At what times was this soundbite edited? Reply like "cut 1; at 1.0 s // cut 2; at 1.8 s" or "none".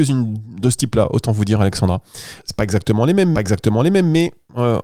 cut 1; at 2.4 s // cut 2; at 3.3 s